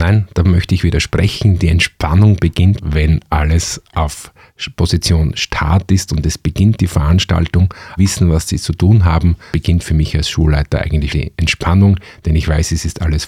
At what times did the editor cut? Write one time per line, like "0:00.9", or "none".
0:02.8
0:08.0
0:09.5
0:11.1